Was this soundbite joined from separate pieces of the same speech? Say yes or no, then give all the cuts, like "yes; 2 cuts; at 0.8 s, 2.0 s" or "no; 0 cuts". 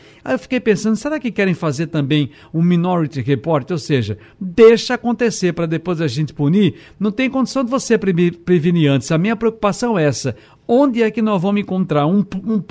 no; 0 cuts